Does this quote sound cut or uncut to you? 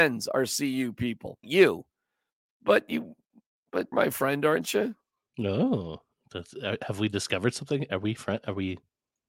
cut